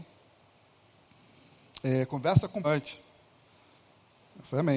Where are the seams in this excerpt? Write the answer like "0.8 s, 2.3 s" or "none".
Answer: 2.6 s

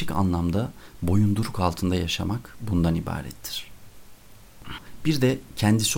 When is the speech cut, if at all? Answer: none

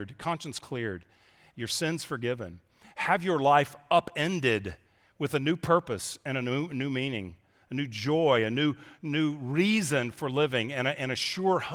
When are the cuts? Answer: none

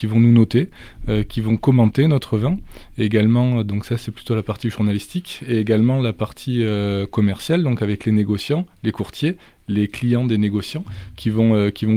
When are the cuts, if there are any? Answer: none

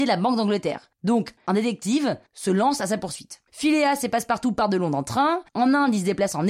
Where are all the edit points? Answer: 0.9 s, 2.3 s, 3.5 s, 5.5 s

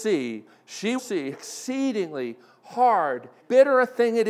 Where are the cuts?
1.0 s, 1.3 s, 3.4 s

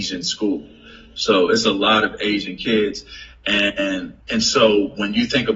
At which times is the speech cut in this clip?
4.2 s

